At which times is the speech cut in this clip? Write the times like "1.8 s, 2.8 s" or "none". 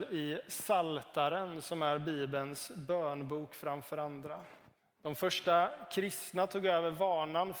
4.8 s